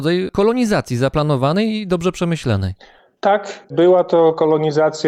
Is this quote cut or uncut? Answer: uncut